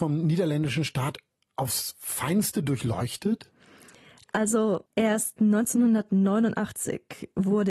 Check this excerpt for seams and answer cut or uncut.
uncut